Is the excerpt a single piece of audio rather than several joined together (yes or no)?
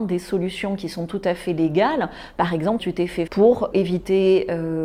no